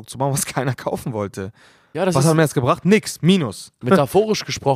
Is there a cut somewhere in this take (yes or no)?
no